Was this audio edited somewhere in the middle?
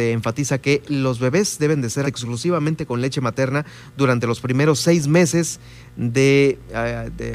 yes; 1 cut; at 2.0 s

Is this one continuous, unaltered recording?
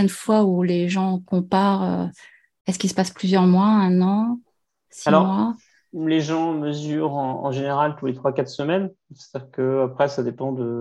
yes; 0 cuts

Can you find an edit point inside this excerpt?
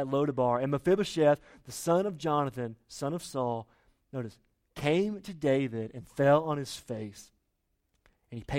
no; 0 cuts

